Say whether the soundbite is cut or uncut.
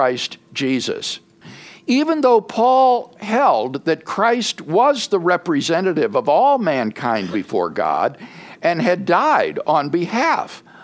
uncut